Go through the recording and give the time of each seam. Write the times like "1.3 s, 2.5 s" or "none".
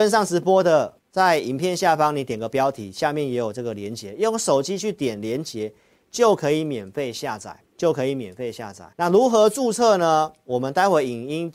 1.0 s, 7.7 s, 8.9 s